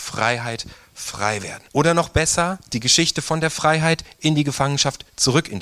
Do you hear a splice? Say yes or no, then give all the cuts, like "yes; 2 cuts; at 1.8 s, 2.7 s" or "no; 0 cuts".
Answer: yes; 1 cut; at 1.7 s